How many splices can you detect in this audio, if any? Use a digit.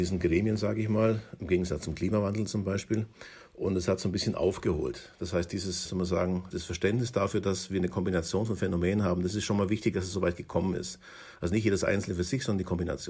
1